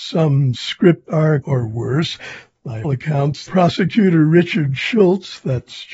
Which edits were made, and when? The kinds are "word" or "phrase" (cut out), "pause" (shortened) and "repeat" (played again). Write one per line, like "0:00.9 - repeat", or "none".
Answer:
0:01.1 - word
0:01.4 - word
0:02.8 - word
0:03.5 - word